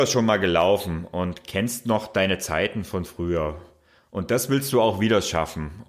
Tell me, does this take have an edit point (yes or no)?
no